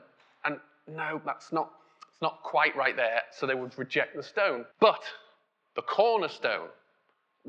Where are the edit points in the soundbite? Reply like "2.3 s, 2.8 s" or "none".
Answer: 4.7 s